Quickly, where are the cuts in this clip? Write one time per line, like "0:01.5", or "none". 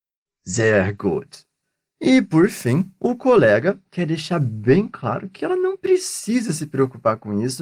none

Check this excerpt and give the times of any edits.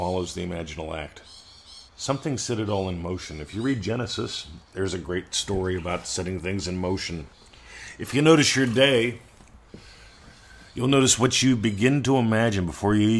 0:01.9
0:04.7

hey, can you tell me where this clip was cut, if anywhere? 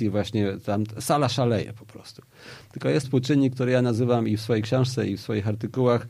0:03.0

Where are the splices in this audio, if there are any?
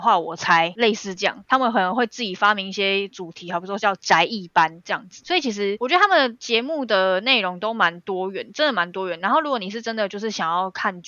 none

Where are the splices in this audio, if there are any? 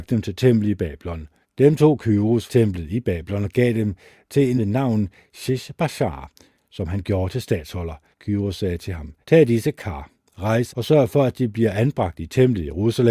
0:01.4
0:02.5
0:04.6
0:08.1
0:09.2
0:10.7

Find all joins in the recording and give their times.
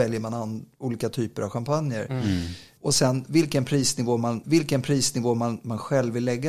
0:04.4

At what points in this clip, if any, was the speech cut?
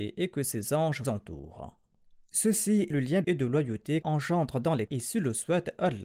0:01.0
0:02.9
0:03.2
0:04.0
0:04.9

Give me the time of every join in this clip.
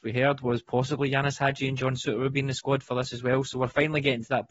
none

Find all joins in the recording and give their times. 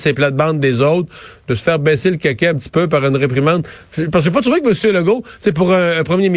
none

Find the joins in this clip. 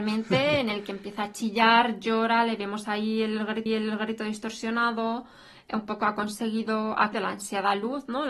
0:03.7
0:07.1

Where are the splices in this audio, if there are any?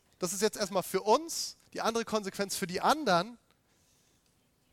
0:01.7

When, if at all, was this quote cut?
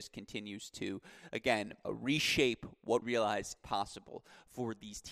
0:01.8
0:03.0
0:03.6

